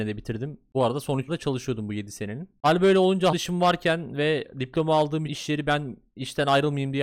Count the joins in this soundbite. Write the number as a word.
three